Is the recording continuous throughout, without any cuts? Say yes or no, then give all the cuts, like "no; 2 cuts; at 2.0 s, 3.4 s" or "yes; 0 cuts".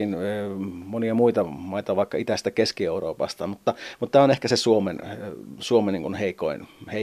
yes; 0 cuts